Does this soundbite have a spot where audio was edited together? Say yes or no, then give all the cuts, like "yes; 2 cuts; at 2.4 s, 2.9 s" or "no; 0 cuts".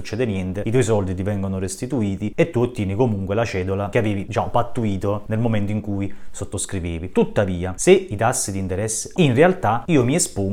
yes; 1 cut; at 9.2 s